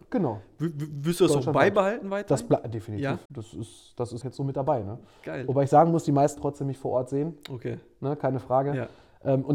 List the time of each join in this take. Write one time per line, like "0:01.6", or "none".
0:03.3
0:04.2
0:06.4